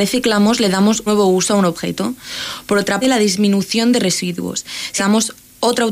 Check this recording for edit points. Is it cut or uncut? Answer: cut